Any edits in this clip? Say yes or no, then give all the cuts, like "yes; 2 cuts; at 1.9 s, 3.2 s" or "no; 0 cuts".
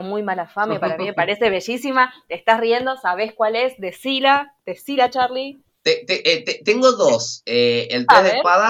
no; 0 cuts